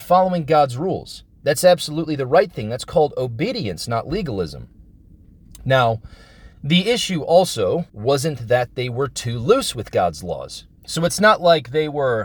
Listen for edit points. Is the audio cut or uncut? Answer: cut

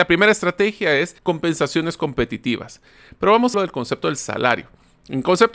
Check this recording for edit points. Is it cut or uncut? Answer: cut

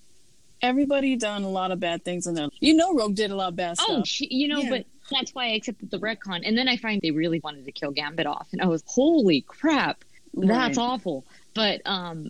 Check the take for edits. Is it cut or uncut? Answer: cut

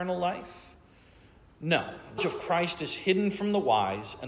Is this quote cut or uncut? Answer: cut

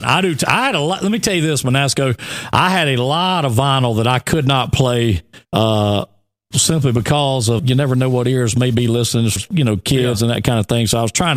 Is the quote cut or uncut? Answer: cut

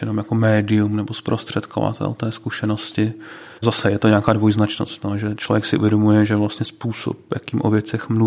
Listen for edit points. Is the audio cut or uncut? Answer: cut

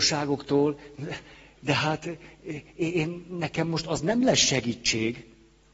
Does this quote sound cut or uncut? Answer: uncut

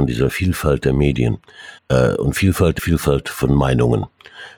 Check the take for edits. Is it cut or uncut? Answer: cut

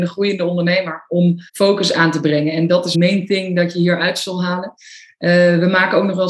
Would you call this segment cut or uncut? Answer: cut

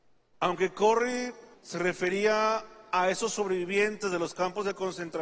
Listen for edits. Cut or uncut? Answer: cut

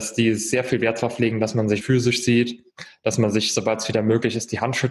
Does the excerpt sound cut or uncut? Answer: cut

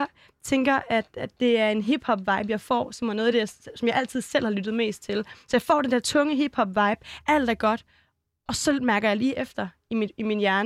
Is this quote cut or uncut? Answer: uncut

